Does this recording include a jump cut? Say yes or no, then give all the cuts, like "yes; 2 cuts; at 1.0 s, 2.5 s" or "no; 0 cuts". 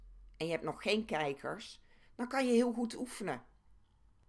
no; 0 cuts